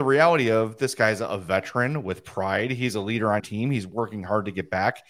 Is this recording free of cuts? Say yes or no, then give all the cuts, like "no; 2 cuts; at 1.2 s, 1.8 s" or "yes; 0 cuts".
no; 1 cut; at 3.4 s